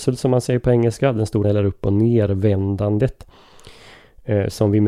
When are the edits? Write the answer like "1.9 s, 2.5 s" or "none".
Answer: 1.4 s